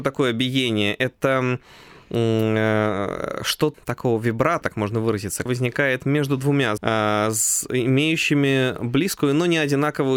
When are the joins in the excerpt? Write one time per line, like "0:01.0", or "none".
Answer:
0:03.7
0:04.6
0:05.5
0:06.8

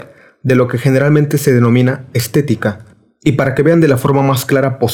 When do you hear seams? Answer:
none

